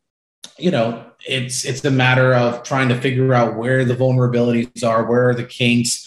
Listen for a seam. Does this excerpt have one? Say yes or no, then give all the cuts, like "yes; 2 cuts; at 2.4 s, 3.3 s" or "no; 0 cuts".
no; 0 cuts